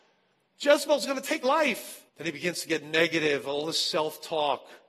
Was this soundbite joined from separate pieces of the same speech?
yes; 2 cuts; at 1.4 s, 2.1 s

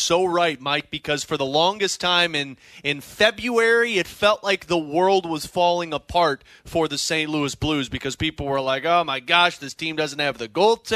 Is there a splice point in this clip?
no; 0 cuts

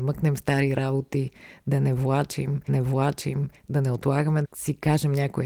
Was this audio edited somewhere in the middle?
yes; 2 cuts; at 2.7 s, 4.4 s

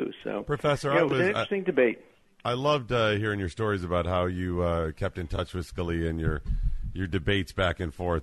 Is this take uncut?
yes; 0 cuts

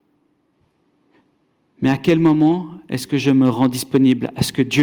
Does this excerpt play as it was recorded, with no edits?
yes; 0 cuts

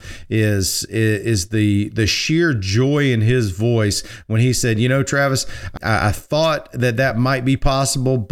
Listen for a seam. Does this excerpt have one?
yes; 1 cut; at 5.8 s

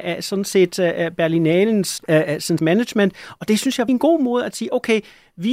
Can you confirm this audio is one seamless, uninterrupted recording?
no; 3 cuts; at 2.0 s, 2.6 s, 3.9 s

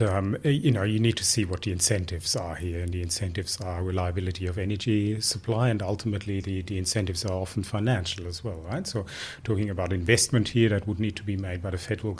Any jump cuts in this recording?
no; 0 cuts

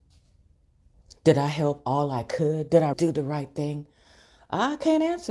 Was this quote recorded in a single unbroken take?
no; 1 cut; at 2.9 s

